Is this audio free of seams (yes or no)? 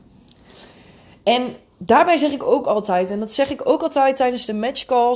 yes